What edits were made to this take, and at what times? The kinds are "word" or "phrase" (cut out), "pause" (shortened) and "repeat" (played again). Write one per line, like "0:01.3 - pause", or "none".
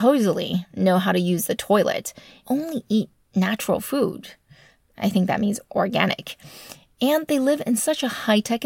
0:02.4 - word